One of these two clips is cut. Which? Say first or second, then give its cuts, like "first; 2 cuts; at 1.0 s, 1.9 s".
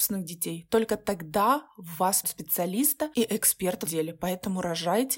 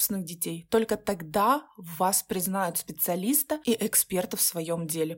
first; 2 cuts; at 2.2 s, 3.9 s